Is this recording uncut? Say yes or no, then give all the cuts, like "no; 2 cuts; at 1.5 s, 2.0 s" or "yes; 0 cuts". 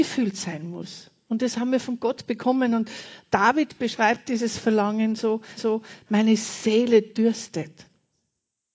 no; 1 cut; at 5.6 s